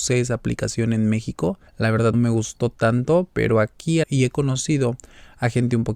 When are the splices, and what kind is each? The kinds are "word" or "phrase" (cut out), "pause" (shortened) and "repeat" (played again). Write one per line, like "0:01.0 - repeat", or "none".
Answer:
0:01.7 - pause
0:02.1 - word
0:03.3 - pause
0:04.0 - phrase